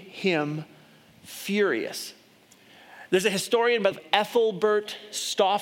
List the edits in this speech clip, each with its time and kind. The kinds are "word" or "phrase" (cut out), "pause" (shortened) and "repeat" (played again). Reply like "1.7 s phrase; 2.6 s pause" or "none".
3.9 s word